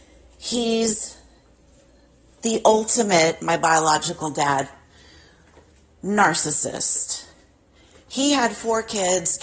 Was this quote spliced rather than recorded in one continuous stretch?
no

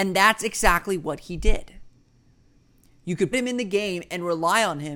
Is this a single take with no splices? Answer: no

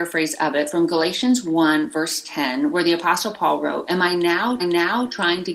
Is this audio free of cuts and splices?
no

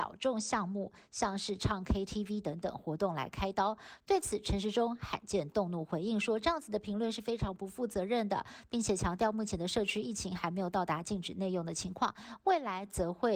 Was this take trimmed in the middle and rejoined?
no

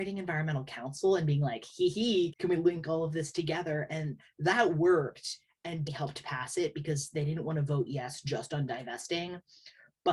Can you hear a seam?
yes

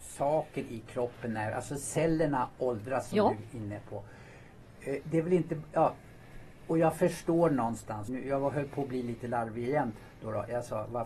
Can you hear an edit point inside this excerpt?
yes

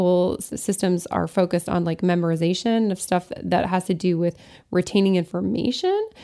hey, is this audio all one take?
yes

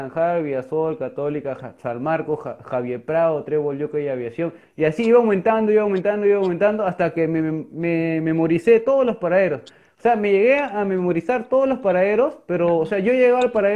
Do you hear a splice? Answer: no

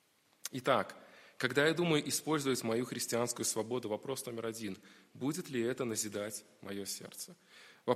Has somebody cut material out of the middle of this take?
no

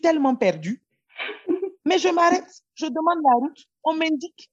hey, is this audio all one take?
yes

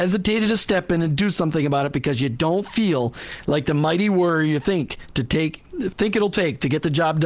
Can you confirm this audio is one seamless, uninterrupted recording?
yes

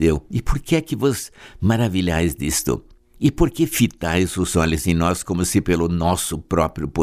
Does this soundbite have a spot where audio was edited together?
no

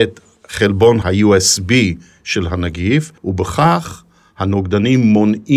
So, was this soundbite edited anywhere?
yes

